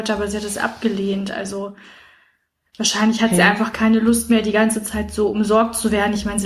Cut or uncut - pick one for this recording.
uncut